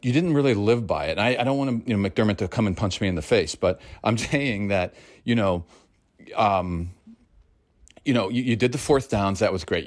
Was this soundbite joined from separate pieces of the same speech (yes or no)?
yes